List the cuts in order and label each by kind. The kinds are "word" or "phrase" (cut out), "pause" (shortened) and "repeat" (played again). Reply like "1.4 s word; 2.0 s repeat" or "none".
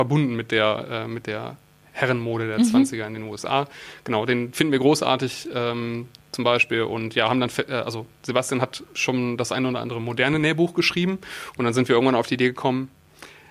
none